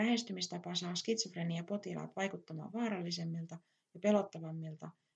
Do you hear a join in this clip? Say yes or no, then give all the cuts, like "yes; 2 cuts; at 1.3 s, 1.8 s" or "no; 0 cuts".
no; 0 cuts